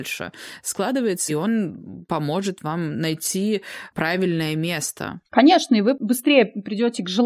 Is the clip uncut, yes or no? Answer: no